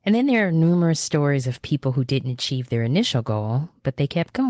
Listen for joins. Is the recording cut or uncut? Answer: uncut